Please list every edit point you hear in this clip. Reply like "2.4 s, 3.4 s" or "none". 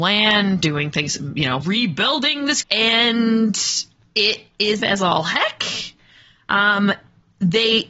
1.6 s, 2.6 s, 4.8 s

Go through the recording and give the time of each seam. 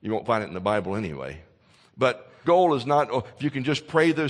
2.4 s

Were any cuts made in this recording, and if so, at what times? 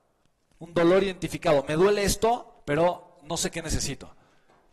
2.6 s

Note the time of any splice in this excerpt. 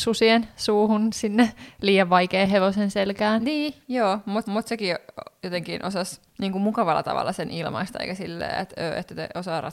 4.4 s, 6.3 s

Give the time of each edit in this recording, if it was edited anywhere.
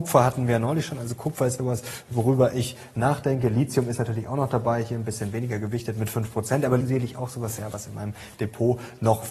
1.6 s, 6.8 s

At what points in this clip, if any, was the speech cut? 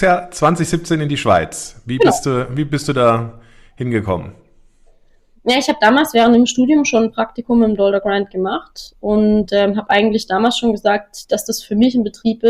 none

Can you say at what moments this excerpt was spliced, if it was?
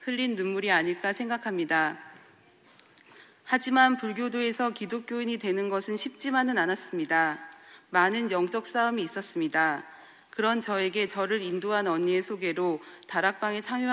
none

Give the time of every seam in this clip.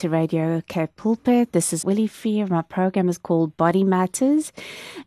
1.8 s

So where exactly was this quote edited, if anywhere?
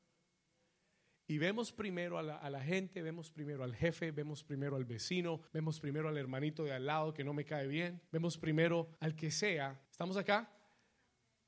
5.5 s, 8.1 s, 9.0 s, 9.8 s

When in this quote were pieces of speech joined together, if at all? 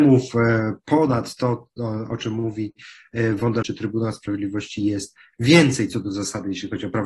3.6 s

